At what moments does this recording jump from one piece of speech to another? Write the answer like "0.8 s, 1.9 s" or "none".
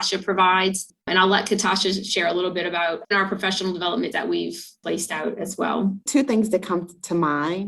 1.0 s, 3.1 s, 4.1 s, 6.0 s